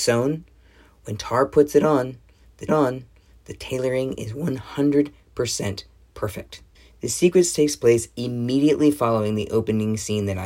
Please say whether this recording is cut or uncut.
cut